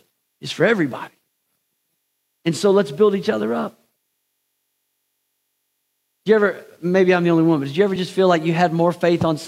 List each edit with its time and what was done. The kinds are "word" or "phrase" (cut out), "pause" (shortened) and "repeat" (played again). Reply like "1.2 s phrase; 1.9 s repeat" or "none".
none